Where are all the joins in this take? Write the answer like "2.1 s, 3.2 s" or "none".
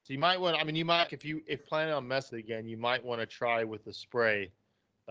1.1 s, 1.6 s, 2.3 s